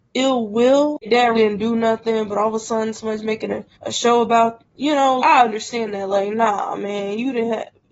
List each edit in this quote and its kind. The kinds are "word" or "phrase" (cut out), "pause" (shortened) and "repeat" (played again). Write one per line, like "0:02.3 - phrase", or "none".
0:01.3 - word
0:03.7 - pause
0:05.2 - word